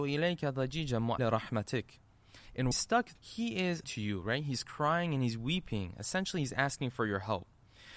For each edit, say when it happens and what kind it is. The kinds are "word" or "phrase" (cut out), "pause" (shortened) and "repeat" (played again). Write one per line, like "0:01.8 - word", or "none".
0:01.2 - word
0:02.7 - phrase
0:03.2 - word
0:03.8 - word